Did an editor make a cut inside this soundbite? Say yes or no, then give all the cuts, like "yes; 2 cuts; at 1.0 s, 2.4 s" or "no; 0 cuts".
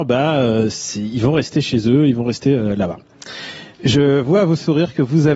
yes; 1 cut; at 3.7 s